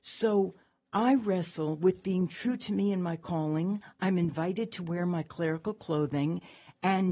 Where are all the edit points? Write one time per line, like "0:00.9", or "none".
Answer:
none